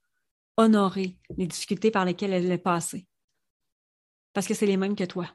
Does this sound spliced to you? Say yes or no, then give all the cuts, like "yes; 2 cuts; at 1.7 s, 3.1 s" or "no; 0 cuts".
no; 0 cuts